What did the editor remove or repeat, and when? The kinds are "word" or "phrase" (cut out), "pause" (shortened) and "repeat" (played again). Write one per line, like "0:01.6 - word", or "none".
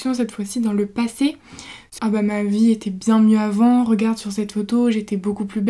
0:02.0 - word